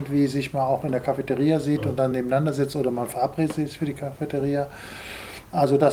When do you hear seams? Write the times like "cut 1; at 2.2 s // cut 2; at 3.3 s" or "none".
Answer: none